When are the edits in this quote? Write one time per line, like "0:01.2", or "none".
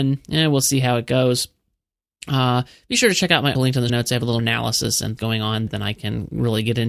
0:03.5
0:03.9
0:04.4
0:05.2
0:05.7